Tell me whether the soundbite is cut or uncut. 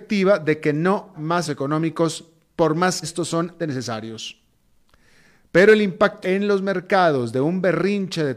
cut